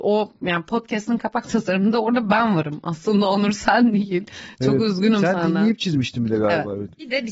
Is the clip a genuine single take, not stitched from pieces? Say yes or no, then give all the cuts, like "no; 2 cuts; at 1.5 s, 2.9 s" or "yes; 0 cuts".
yes; 0 cuts